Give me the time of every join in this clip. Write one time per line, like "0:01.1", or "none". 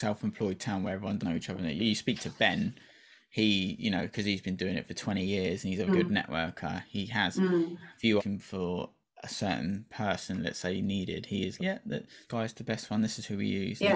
0:01.2
0:01.8
0:05.9
0:08.2
0:11.6
0:12.3